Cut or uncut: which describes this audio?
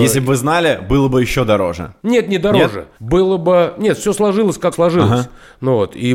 cut